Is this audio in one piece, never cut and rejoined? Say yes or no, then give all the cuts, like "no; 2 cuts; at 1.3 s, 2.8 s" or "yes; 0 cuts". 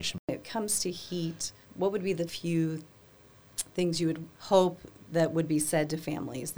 no; 3 cuts; at 1.6 s, 2.3 s, 4.3 s